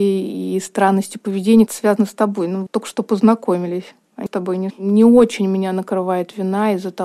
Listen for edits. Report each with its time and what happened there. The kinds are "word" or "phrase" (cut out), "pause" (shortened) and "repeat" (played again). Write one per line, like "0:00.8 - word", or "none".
0:01.7 - word
0:02.7 - word
0:04.3 - word
0:04.7 - word